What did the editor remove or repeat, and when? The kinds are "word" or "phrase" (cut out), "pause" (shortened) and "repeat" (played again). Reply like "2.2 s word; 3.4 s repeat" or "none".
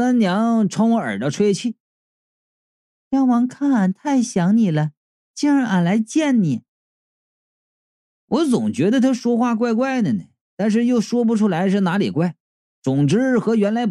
none